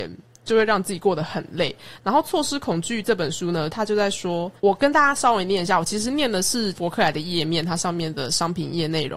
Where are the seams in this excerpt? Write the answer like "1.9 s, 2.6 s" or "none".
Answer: 4.6 s